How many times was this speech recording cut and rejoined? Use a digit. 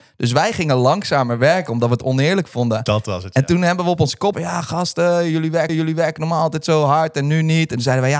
2